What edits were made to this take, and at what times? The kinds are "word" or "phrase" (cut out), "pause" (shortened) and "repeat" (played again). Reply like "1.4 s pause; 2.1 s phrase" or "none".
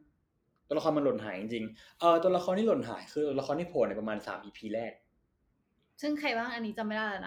none